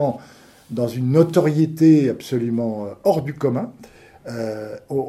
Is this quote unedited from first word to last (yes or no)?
yes